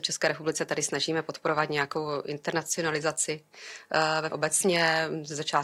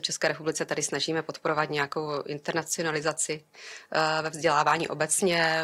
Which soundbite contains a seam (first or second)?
first